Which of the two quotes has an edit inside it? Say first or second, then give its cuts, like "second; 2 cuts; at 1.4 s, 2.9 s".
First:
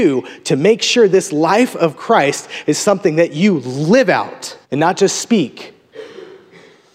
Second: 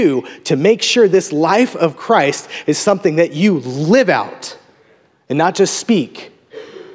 first; 1 cut; at 4.6 s